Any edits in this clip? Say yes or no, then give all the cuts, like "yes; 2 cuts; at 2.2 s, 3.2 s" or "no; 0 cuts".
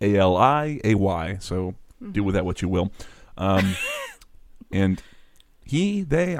no; 0 cuts